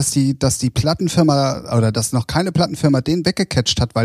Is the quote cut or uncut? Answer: uncut